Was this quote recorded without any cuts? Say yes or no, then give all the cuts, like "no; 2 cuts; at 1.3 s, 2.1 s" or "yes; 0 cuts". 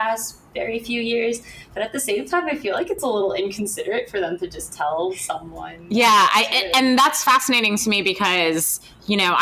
yes; 0 cuts